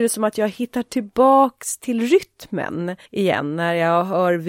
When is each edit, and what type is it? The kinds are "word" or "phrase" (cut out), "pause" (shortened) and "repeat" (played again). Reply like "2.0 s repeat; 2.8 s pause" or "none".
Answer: 3.1 s pause